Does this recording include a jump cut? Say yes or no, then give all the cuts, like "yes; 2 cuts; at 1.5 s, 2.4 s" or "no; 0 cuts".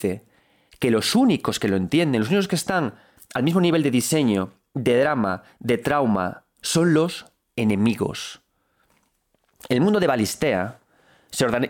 no; 0 cuts